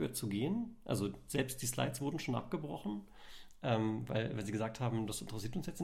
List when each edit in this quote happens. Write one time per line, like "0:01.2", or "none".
none